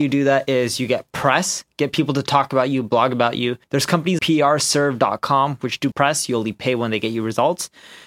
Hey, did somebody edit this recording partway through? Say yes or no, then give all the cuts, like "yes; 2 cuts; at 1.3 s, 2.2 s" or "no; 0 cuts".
yes; 3 cuts; at 3.6 s, 4.2 s, 5.9 s